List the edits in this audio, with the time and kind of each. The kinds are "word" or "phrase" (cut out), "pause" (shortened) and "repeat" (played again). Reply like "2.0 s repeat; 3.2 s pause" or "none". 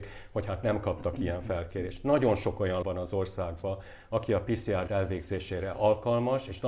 2.8 s word; 4.9 s word